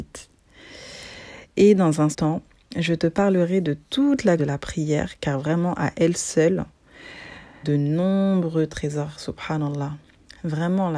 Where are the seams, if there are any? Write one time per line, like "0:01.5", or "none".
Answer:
0:02.1
0:04.4
0:05.2
0:07.6